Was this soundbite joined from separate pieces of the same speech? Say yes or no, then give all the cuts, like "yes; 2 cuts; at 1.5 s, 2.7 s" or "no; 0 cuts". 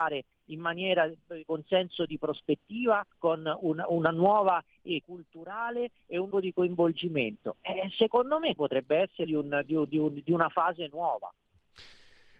yes; 6 cuts; at 1.5 s, 3.1 s, 5.0 s, 6.3 s, 8.6 s, 9.2 s